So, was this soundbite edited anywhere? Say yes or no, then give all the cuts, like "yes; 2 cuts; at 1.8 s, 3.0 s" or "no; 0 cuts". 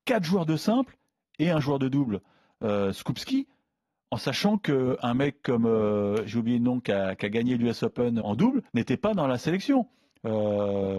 yes; 2 cuts; at 8.2 s, 8.7 s